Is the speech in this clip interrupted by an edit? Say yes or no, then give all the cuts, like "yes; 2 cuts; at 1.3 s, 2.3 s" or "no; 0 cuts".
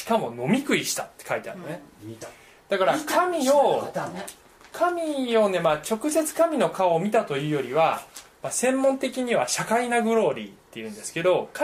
no; 0 cuts